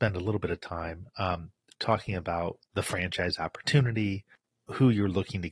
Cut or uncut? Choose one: uncut